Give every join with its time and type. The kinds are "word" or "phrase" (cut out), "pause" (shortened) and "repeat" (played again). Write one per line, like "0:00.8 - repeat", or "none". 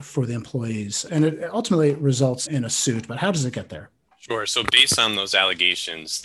0:01.1 - word
0:02.5 - word
0:04.1 - pause